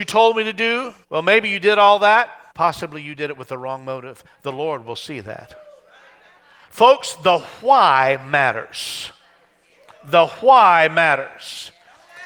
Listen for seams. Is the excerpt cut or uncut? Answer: cut